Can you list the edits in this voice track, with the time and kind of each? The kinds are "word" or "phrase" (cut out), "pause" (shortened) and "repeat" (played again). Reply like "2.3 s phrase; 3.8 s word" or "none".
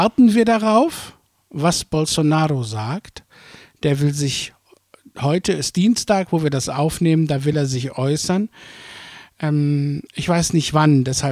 none